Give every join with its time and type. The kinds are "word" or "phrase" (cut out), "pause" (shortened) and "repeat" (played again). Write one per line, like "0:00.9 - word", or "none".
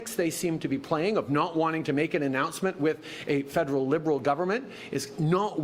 none